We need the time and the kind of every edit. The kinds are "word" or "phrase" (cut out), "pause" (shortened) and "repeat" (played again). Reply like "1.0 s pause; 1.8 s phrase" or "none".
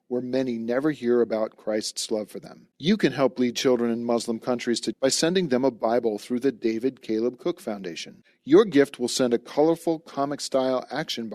2.7 s pause; 4.9 s word